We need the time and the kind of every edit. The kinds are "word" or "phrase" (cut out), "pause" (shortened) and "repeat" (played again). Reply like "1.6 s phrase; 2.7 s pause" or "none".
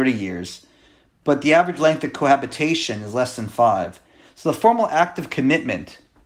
none